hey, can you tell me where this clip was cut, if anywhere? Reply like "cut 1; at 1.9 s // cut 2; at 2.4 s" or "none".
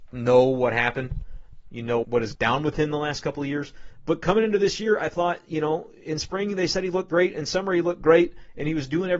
cut 1; at 2.0 s // cut 2; at 2.3 s